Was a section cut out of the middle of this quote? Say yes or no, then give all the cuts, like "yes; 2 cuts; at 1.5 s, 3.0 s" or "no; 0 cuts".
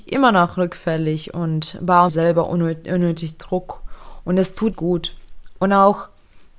yes; 2 cuts; at 2.1 s, 4.7 s